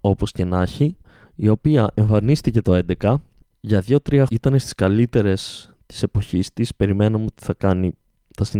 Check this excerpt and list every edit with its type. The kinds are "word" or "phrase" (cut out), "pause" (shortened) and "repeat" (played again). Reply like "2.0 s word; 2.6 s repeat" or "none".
4.3 s word